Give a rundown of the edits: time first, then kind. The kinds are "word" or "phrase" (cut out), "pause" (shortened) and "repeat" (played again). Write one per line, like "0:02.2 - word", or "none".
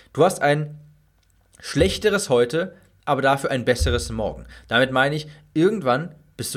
none